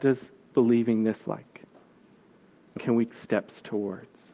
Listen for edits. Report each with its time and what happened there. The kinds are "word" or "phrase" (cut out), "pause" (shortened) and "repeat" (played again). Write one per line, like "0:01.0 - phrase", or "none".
0:01.2 - word
0:02.8 - word
0:03.1 - word